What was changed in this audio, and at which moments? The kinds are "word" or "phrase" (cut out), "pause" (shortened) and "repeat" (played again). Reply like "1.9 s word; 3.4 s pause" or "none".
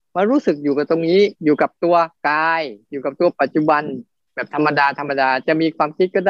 1.4 s pause; 2.2 s pause; 4.3 s pause